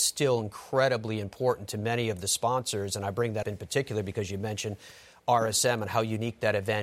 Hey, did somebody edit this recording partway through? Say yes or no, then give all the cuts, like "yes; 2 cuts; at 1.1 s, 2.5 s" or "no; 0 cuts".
yes; 1 cut; at 3.4 s